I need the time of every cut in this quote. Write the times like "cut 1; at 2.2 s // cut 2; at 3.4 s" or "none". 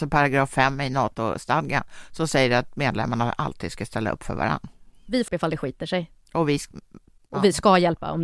cut 1; at 5.3 s